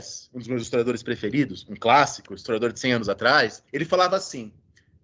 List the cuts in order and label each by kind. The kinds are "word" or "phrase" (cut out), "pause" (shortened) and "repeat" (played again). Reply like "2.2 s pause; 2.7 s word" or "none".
3.7 s pause